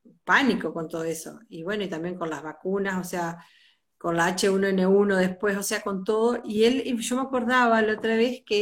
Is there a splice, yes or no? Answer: no